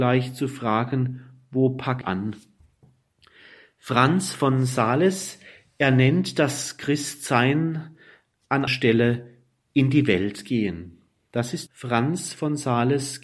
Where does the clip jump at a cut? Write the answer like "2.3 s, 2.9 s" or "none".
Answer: 2.0 s, 8.7 s, 11.7 s